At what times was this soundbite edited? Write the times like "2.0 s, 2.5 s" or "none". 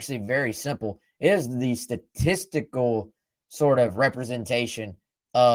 none